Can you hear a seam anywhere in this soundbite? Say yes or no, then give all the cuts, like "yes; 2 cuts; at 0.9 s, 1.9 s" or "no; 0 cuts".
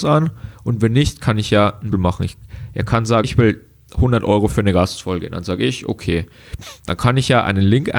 yes; 2 cuts; at 1.9 s, 3.2 s